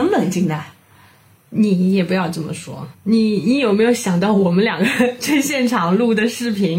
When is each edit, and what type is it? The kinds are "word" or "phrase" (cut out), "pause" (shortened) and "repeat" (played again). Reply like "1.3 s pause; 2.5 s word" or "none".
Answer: 2.9 s word